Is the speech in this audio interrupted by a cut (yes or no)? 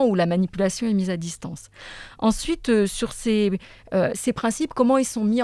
no